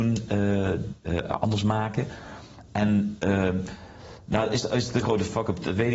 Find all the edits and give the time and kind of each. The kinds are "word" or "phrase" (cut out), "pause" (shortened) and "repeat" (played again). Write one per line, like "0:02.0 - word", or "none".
none